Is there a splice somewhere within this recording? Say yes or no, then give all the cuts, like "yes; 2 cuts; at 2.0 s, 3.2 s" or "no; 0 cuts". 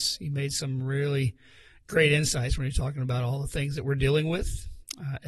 no; 0 cuts